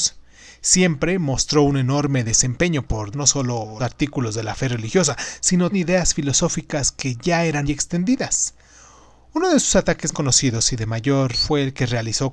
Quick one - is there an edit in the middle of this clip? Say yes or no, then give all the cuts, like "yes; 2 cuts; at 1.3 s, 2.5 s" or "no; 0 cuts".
yes; 6 cuts; at 3.1 s, 3.8 s, 5.7 s, 7.7 s, 10.1 s, 11.3 s